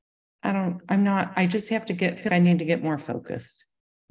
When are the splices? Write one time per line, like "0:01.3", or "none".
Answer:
0:02.3

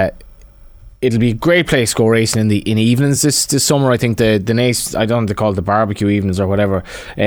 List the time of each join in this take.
none

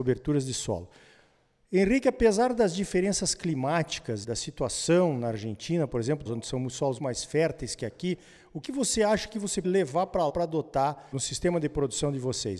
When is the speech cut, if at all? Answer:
0:04.2
0:06.3
0:07.0
0:08.6
0:09.6
0:10.3

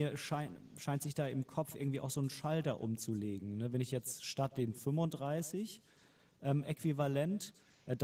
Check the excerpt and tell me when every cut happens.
none

